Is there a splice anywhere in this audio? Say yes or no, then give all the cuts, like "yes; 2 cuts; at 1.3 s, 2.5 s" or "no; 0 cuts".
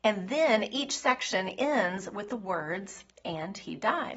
no; 0 cuts